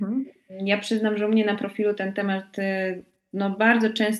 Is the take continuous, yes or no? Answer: yes